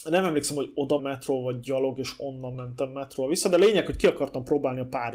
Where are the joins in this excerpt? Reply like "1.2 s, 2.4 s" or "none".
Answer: 1.0 s